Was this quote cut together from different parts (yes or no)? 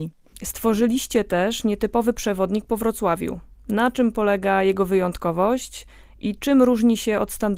no